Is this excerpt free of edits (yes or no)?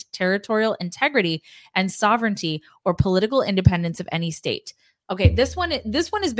yes